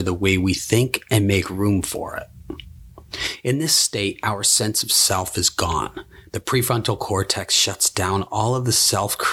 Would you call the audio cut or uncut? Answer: uncut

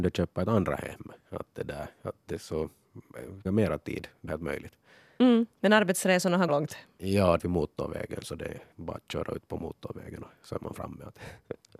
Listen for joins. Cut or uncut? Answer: cut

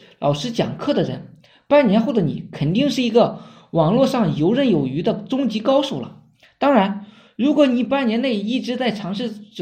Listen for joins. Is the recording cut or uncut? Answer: uncut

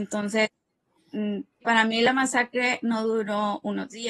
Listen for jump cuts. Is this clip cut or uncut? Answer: cut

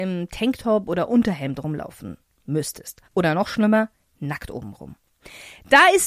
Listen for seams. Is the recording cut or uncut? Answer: cut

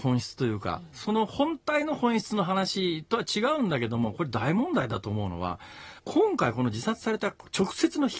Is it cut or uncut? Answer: cut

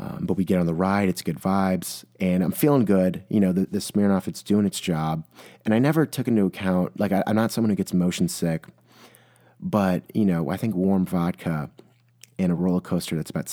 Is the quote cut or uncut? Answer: uncut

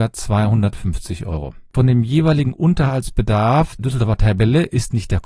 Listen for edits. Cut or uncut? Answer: cut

